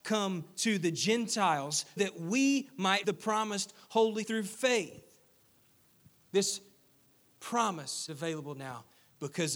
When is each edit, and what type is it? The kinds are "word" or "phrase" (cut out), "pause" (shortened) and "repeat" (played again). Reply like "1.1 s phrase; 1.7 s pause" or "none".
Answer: 2.0 s word; 3.0 s word; 4.2 s word; 8.1 s word